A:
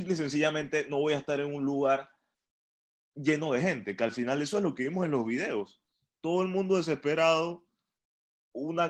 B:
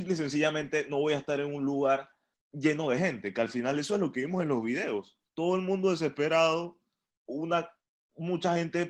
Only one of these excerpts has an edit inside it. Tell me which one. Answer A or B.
B